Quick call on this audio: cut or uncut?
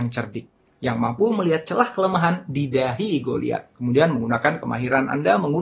cut